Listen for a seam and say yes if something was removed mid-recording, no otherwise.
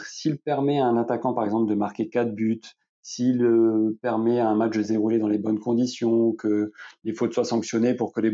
no